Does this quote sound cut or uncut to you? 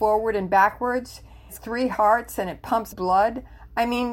cut